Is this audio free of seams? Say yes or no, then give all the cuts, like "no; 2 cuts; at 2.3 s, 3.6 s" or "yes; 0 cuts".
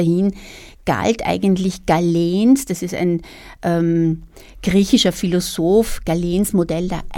yes; 0 cuts